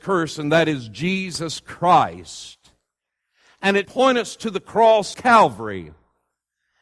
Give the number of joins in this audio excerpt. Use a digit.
2